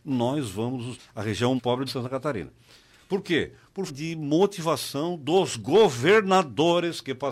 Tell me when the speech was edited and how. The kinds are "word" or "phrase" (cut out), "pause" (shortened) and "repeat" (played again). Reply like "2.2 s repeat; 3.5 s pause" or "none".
1.0 s word; 1.6 s word; 1.9 s word; 3.9 s word